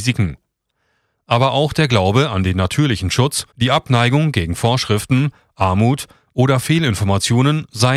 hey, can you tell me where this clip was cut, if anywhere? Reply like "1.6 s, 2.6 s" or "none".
3.5 s